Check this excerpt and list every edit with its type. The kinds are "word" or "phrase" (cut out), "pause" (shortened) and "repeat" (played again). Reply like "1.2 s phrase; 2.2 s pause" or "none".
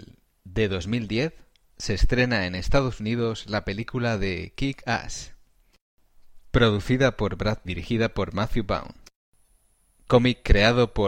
7.7 s phrase